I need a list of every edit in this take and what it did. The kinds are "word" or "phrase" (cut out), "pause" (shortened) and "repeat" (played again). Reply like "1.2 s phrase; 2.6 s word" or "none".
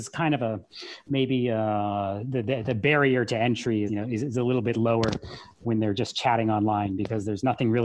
3.9 s word